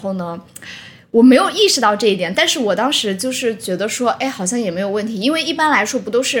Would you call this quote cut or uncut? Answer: uncut